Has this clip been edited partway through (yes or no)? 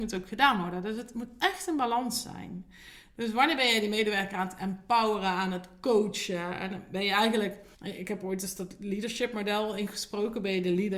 yes